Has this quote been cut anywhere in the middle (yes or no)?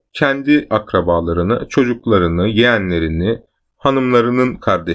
no